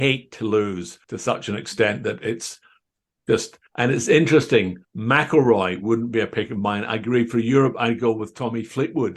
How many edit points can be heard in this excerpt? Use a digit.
3